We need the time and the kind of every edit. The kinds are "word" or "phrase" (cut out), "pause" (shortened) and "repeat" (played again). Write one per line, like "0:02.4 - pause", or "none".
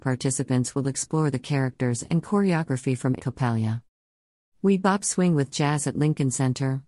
0:03.2 - phrase